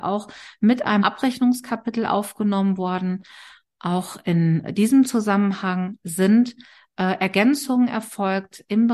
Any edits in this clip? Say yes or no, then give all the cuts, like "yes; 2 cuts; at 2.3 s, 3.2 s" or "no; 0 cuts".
yes; 1 cut; at 1.0 s